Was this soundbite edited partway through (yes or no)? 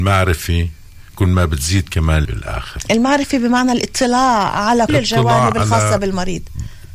yes